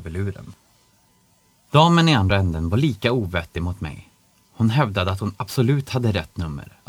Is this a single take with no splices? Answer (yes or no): yes